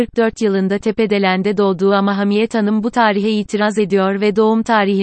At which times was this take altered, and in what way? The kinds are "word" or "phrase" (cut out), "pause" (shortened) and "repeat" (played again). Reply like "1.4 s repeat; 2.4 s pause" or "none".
none